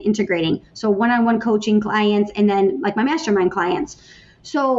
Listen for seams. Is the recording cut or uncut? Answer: uncut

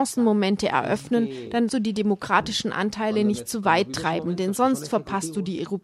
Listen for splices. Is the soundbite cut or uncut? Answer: cut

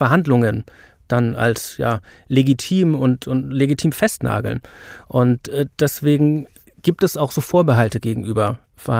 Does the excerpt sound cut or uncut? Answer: uncut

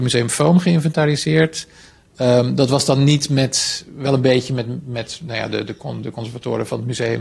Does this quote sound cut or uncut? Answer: uncut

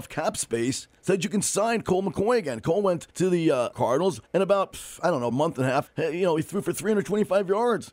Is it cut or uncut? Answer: cut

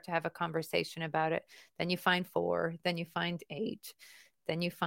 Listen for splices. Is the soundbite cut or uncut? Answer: uncut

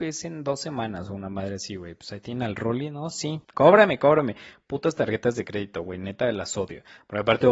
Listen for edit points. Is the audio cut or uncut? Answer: cut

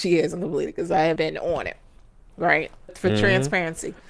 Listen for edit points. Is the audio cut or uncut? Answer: cut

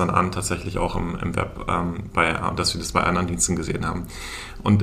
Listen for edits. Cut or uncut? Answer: uncut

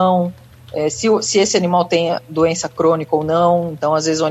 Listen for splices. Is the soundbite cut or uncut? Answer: uncut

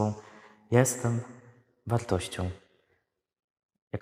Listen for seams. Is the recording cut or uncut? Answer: uncut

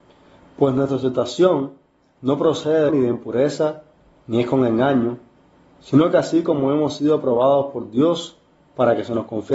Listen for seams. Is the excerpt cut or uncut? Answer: cut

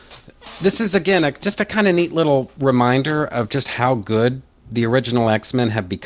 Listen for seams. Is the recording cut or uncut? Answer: uncut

